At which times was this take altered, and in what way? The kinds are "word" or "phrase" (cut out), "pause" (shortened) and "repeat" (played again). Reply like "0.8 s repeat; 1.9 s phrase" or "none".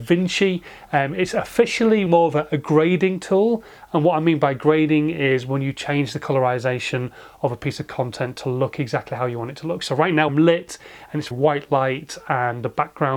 2.1 s word; 10.3 s word; 11.3 s word